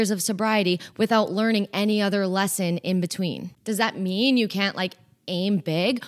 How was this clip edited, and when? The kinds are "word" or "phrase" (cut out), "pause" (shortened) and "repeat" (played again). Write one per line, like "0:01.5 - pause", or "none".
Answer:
none